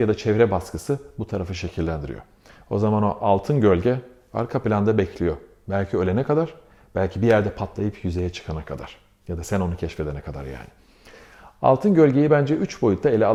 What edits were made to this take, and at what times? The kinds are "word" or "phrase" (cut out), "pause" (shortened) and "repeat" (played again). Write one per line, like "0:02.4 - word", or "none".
none